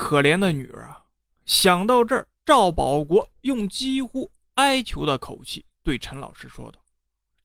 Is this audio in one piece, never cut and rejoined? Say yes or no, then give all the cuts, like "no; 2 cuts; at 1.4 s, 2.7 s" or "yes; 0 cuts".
no; 1 cut; at 2.4 s